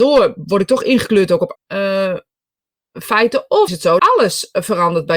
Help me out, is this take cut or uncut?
cut